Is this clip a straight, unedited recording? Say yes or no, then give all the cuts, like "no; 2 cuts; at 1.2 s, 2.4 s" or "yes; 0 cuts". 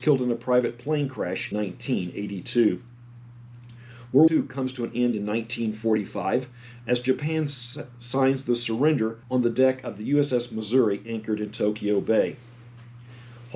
no; 3 cuts; at 1.5 s, 4.3 s, 9.2 s